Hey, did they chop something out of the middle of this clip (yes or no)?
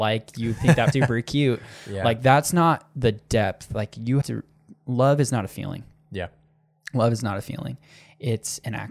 yes